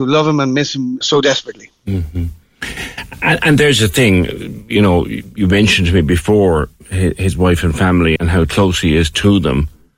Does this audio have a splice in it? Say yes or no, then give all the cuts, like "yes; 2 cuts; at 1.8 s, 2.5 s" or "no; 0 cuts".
yes; 2 cuts; at 1.0 s, 8.2 s